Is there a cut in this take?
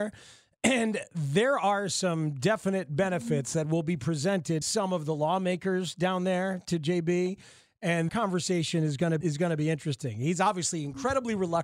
yes; 3 cuts; at 4.6 s, 8.1 s, 9.2 s

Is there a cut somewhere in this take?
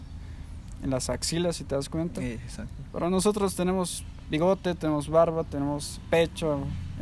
no; 0 cuts

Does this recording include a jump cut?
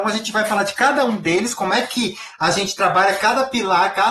no; 0 cuts

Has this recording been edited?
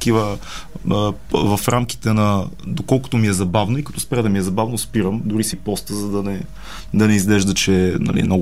yes; 1 cut; at 5.5 s

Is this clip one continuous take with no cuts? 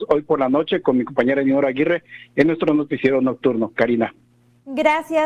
yes; 0 cuts

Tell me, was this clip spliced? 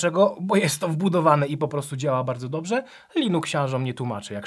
no; 0 cuts

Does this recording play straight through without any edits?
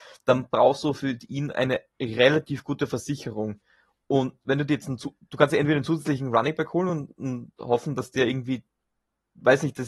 yes; 0 cuts

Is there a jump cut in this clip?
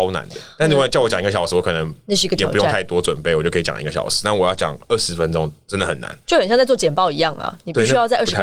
no; 0 cuts

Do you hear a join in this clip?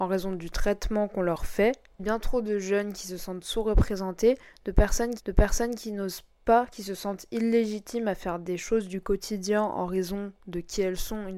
yes; 1 cut; at 5.2 s

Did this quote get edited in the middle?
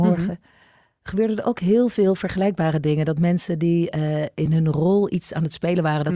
no; 0 cuts

